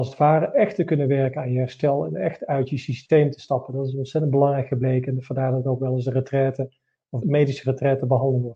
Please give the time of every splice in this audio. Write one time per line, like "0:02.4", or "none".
0:07.2